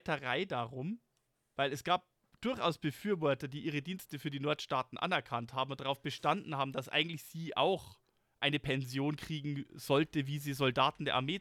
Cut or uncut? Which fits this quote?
uncut